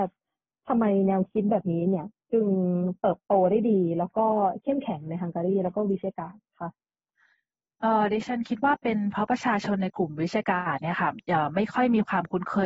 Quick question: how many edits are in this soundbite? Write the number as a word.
zero